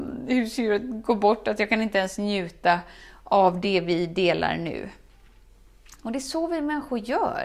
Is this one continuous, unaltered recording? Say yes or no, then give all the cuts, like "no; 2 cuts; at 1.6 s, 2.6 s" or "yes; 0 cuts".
yes; 0 cuts